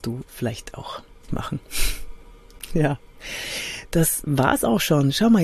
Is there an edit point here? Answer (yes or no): yes